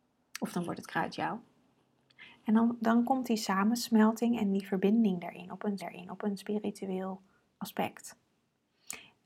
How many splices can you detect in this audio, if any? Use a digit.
1